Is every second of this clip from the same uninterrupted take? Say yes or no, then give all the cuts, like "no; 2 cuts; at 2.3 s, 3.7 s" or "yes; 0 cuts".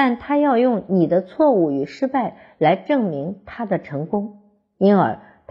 yes; 0 cuts